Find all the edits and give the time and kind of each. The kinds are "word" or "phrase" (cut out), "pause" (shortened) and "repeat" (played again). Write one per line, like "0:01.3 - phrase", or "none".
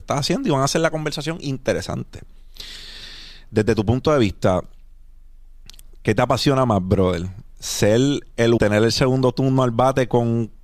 0:08.6 - word